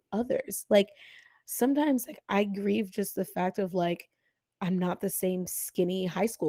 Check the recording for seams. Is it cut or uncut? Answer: uncut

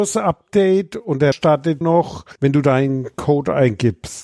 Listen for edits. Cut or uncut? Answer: cut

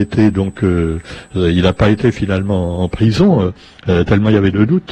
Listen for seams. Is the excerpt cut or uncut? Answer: uncut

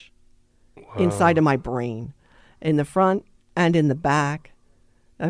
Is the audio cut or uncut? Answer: uncut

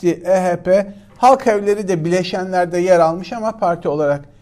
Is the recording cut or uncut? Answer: uncut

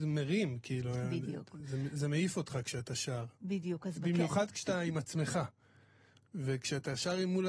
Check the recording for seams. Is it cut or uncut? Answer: uncut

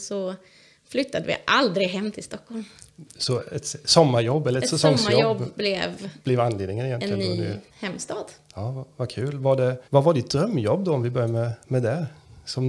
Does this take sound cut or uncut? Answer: cut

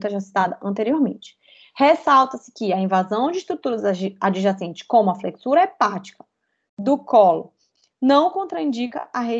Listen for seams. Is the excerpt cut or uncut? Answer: uncut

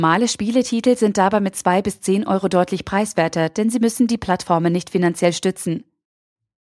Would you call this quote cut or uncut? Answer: uncut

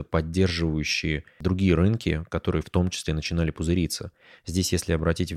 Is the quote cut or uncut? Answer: uncut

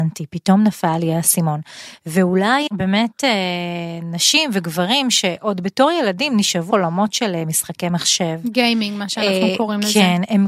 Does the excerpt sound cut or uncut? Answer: cut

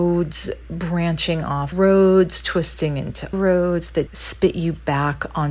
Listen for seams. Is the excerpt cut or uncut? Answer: cut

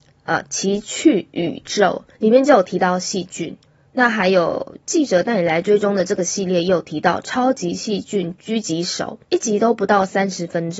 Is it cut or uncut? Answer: cut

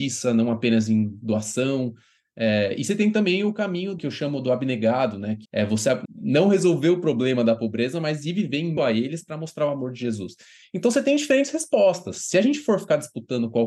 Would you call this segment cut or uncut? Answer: cut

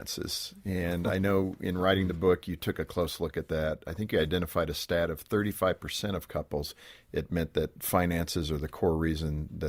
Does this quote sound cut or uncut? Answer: uncut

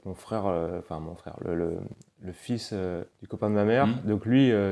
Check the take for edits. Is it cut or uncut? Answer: cut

